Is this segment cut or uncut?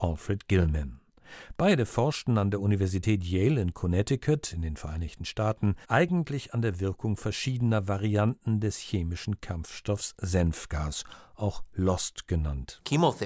cut